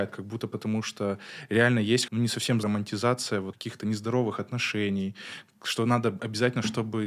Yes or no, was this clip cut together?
yes